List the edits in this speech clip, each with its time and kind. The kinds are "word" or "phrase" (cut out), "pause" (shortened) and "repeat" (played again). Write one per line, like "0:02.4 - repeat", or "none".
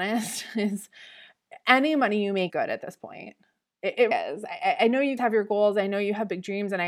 0:02.5 - word
0:04.1 - word
0:05.2 - word

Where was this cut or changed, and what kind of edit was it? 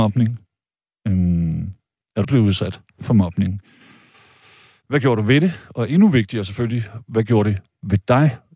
0:02.2 - word

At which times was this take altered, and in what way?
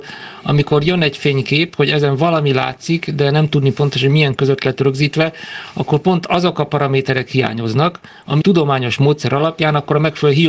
0:04.4 - word
0:08.4 - phrase

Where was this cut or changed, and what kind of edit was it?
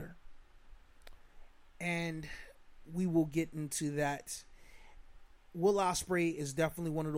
none

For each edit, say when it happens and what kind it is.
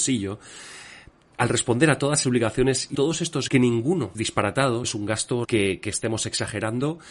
0:02.2 - word
0:02.9 - word
0:03.5 - word
0:04.1 - word
0:04.8 - word
0:05.4 - word

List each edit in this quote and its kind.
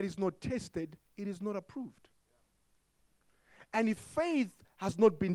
0:04.0 - word

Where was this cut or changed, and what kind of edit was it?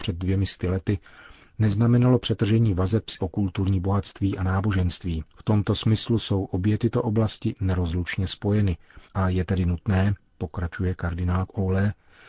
0:03.2 - phrase
0:05.3 - pause
0:09.0 - pause

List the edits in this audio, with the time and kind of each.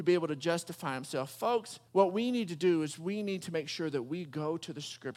0:01.9 - pause

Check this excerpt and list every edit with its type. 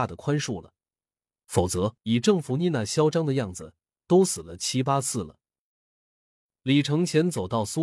0:02.0 - pause

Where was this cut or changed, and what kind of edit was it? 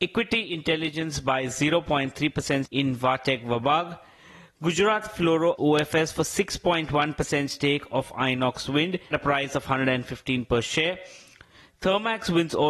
0:02.6 - word
0:05.6 - word
0:09.1 - word

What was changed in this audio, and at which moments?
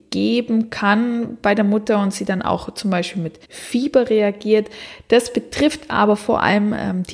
0:03.4 - pause

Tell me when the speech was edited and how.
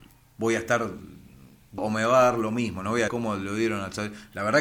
0:01.8 - word
0:03.1 - phrase

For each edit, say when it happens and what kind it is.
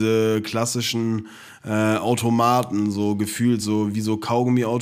none

